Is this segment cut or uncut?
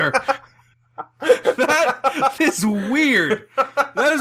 cut